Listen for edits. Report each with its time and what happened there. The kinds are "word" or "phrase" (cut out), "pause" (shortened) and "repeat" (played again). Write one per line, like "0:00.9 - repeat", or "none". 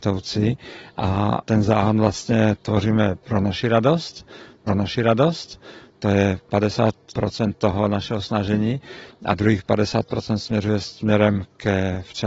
0:04.7 - repeat